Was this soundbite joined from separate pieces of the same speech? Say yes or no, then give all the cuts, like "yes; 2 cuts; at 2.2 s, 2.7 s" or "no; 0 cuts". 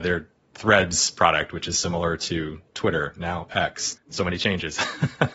yes; 1 cut; at 4.0 s